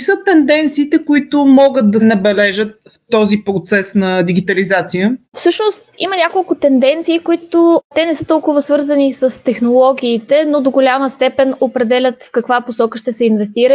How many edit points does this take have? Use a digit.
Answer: 2